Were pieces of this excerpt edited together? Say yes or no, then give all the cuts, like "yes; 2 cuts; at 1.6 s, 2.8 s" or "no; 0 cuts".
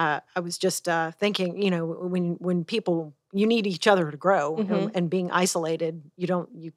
no; 0 cuts